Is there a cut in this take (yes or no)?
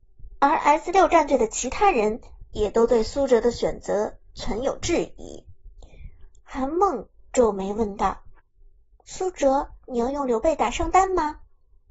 yes